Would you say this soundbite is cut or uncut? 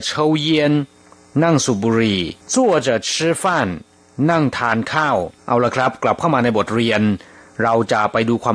cut